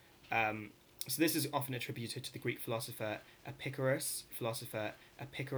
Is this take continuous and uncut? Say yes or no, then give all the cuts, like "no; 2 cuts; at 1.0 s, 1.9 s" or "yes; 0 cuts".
no; 1 cut; at 4.3 s